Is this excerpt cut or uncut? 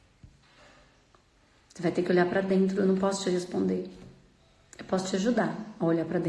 uncut